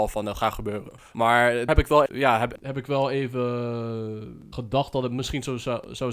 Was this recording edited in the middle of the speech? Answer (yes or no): yes